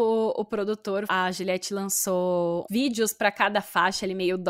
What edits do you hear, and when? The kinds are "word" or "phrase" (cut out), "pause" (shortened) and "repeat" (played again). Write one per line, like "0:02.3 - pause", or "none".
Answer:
0:01.1 - word
0:02.7 - word